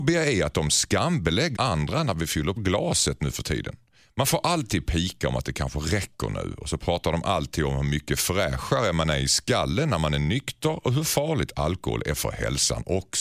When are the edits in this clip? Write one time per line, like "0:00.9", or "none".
0:01.6
0:02.6

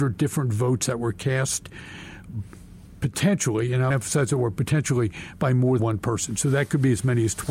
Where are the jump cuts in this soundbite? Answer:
0:03.9
0:05.8

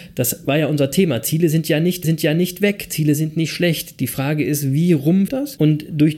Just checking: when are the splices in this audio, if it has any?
0:02.0
0:05.3

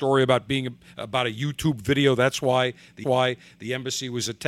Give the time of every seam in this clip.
0:03.0

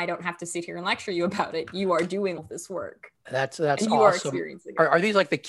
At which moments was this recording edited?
0:02.4

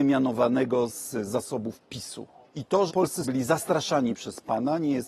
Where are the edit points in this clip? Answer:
0:02.4
0:02.9
0:03.2

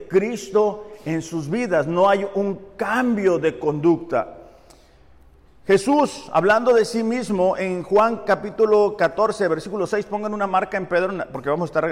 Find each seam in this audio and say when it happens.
none

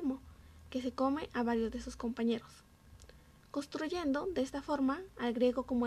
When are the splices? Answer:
none

